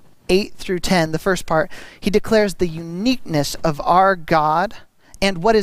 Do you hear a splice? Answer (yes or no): no